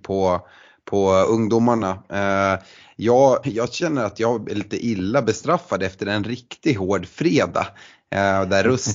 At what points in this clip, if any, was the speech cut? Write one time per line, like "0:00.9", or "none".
0:03.4